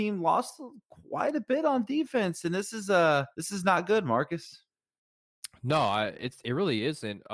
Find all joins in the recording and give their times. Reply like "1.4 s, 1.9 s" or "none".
3.3 s